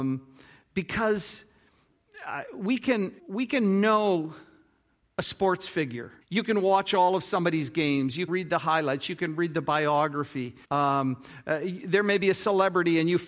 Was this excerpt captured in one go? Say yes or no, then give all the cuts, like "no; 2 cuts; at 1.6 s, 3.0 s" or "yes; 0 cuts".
no; 4 cuts; at 3.2 s, 6.2 s, 8.3 s, 10.6 s